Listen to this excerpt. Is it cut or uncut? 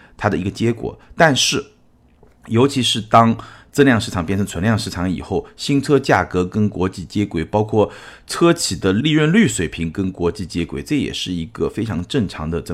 uncut